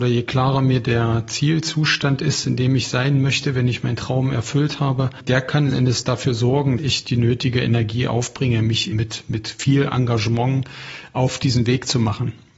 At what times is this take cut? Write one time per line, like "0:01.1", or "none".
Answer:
0:05.7
0:06.8
0:08.9